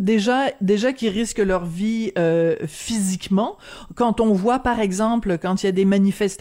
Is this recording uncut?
yes; 0 cuts

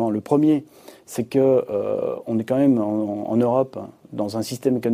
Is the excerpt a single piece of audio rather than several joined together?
yes; 0 cuts

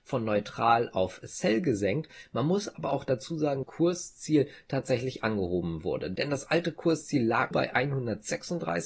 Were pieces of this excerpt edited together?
yes; 2 cuts; at 3.6 s, 7.5 s

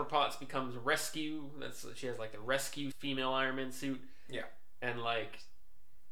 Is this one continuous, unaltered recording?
no; 1 cut; at 2.9 s

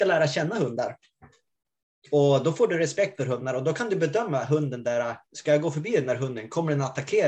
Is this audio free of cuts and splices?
no; 1 cut; at 5.2 s

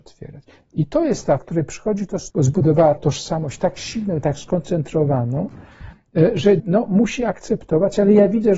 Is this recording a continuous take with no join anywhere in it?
no; 4 cuts; at 1.4 s, 2.3 s, 3.0 s, 6.6 s

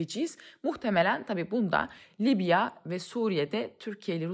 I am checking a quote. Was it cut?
no; 0 cuts

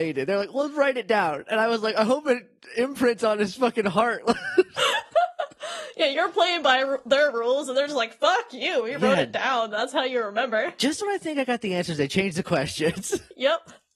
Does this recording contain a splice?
no; 0 cuts

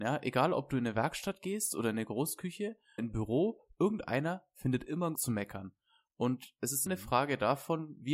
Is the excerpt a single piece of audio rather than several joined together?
no; 3 cuts; at 3.0 s, 5.2 s, 6.9 s

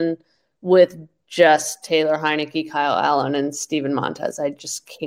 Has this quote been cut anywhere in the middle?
no; 0 cuts

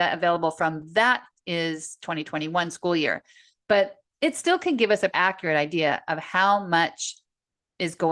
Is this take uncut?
no; 1 cut; at 5.1 s

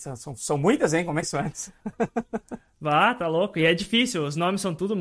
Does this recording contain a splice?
yes; 1 cut; at 1.2 s

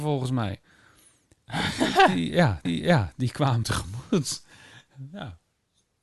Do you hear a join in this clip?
yes; 2 cuts; at 2.7 s, 3.6 s

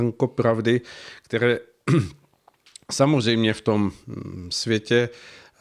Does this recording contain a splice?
no; 0 cuts

